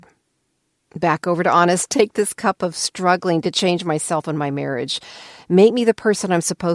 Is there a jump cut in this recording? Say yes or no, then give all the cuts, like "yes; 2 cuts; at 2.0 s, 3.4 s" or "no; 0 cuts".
no; 0 cuts